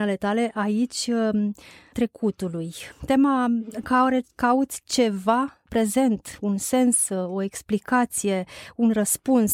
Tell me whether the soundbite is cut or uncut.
cut